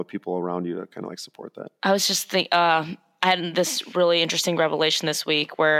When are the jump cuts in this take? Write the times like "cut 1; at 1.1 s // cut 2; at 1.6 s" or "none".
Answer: none

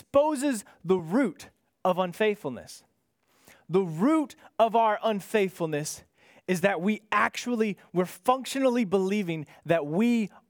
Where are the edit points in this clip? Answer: none

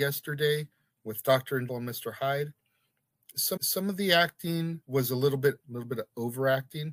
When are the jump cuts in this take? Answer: cut 1; at 1.7 s // cut 2; at 3.6 s // cut 3; at 4.8 s // cut 4; at 5.6 s

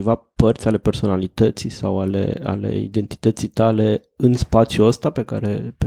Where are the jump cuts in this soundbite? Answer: none

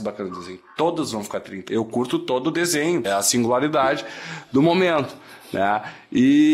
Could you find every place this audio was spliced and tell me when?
cut 1; at 1.7 s // cut 2; at 3.0 s

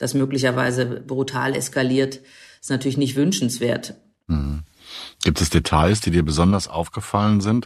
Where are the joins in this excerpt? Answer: none

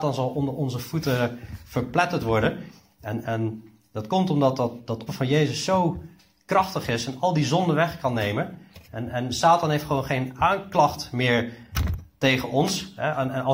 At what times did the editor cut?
cut 1; at 3.2 s // cut 2; at 5.1 s

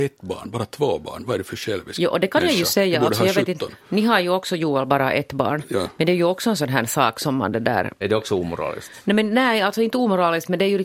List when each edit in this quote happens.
none

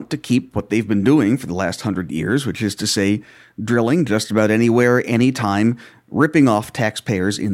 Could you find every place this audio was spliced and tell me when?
none

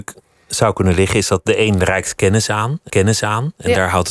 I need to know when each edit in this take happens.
cut 1; at 2.9 s

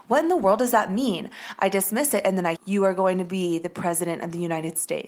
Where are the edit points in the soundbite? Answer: cut 1; at 2.6 s

